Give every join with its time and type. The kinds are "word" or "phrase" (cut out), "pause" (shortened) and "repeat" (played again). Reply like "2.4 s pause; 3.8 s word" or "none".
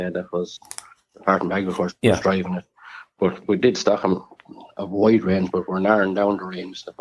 none